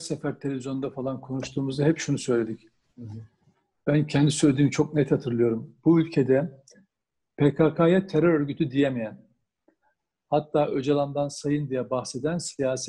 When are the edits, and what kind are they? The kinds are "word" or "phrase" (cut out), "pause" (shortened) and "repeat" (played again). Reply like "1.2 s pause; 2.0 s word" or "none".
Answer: none